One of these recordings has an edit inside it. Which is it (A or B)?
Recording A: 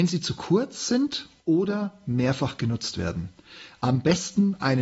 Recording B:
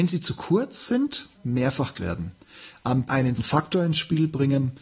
B